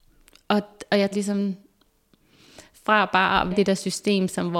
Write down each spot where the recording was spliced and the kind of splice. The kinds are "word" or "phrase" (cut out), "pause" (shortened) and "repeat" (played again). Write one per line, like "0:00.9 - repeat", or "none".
0:01.1 - word
0:03.5 - word